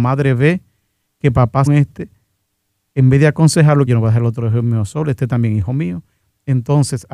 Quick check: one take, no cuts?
no; 2 cuts; at 1.7 s, 3.9 s

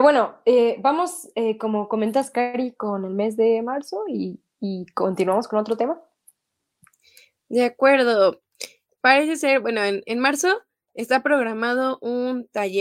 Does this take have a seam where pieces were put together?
no; 0 cuts

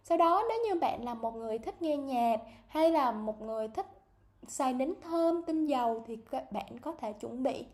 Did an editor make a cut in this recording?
no; 0 cuts

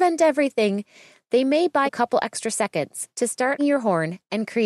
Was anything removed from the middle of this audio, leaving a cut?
yes; 2 cuts; at 1.9 s, 3.6 s

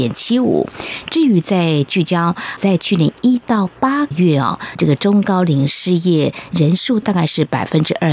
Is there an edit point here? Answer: yes; 1 cut; at 3.8 s

